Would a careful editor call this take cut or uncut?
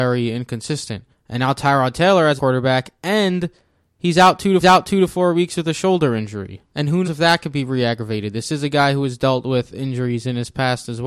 cut